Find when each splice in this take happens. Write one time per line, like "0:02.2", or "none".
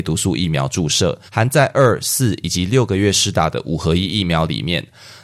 0:01.3